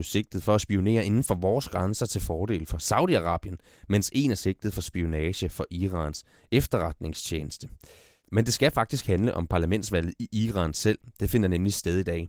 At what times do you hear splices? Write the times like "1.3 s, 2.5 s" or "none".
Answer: none